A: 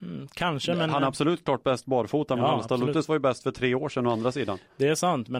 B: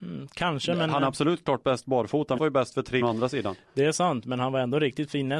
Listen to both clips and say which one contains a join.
B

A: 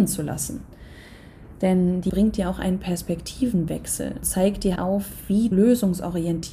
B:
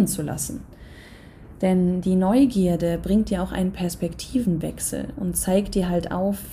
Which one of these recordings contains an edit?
A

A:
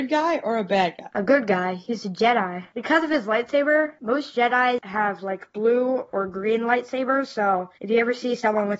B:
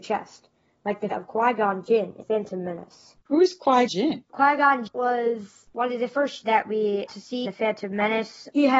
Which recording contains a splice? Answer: B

